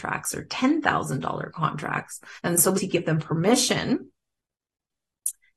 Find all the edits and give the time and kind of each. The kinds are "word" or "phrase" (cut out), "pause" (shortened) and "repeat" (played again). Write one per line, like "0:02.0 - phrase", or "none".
0:02.4 - pause
0:02.7 - word